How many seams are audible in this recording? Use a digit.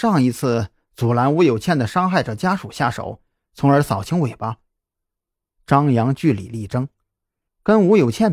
0